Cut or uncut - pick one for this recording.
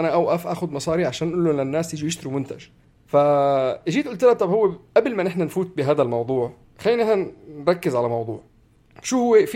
uncut